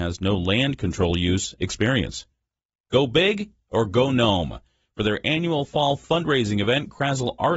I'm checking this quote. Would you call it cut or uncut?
uncut